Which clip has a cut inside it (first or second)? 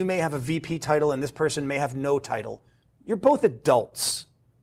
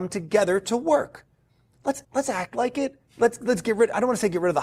second